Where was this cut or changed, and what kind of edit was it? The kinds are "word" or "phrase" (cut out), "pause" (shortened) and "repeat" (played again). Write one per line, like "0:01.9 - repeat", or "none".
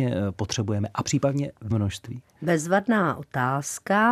0:01.0 - word
0:01.7 - word